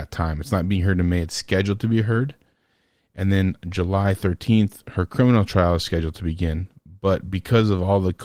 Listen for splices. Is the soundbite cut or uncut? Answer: uncut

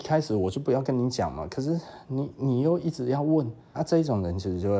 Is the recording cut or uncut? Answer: cut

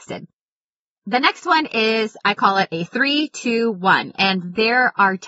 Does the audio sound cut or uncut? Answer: uncut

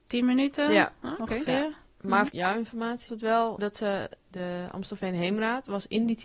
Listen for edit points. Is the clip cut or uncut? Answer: cut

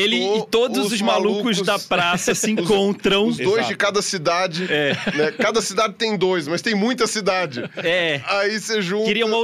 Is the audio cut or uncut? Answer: uncut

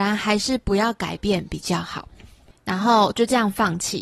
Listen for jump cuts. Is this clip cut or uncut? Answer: uncut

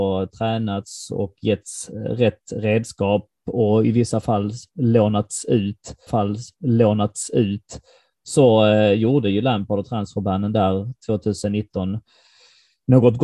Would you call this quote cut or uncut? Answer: cut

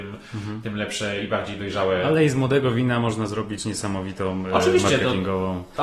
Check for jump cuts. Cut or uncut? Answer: uncut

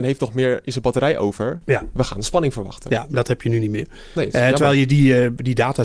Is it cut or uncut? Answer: uncut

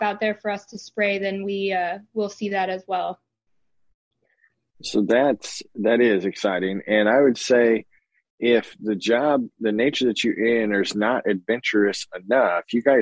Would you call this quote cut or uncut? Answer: uncut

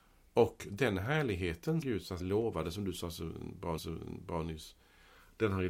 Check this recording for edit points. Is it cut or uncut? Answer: cut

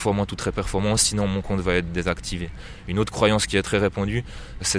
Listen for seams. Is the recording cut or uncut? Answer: uncut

